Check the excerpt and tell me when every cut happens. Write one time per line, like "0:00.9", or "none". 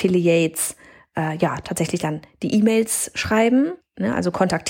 0:03.8